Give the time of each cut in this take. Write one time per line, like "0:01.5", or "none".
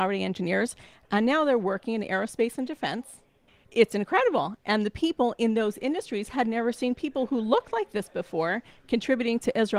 0:03.5